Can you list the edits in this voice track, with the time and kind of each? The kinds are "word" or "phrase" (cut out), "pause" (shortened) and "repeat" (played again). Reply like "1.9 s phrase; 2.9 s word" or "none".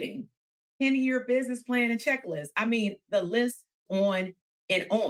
3.9 s word